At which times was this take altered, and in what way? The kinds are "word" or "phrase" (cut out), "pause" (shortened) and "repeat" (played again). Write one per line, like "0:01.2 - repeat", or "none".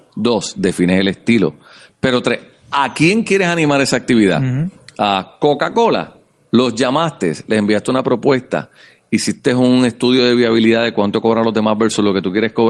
none